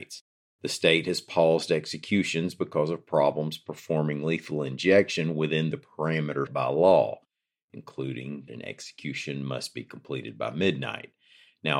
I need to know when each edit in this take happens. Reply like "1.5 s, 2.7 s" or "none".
6.5 s, 8.5 s